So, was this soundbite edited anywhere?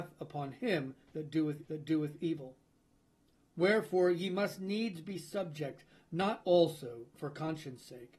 yes; 2 cuts; at 1.6 s, 6.4 s

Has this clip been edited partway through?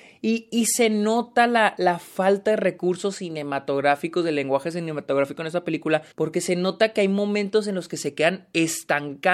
yes; 2 cuts; at 1.8 s, 6.1 s

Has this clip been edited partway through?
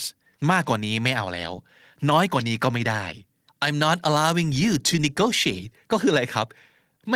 no; 0 cuts

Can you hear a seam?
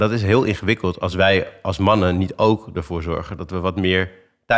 no; 0 cuts

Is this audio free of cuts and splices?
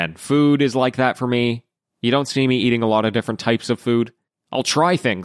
yes; 0 cuts

